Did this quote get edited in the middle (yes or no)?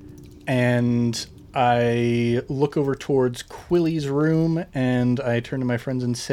no